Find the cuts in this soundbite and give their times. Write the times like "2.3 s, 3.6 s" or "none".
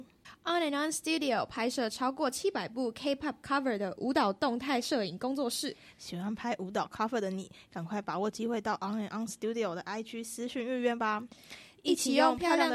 none